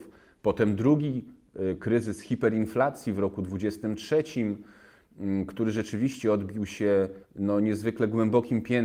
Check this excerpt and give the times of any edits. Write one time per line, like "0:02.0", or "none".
0:07.2